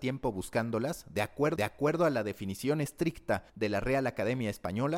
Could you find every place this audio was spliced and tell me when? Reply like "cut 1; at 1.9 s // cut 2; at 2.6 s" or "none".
cut 1; at 1.6 s // cut 2; at 3.5 s